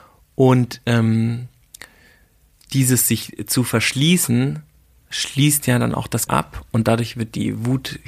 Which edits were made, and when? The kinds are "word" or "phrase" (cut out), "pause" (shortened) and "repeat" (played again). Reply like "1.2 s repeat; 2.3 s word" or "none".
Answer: 6.3 s word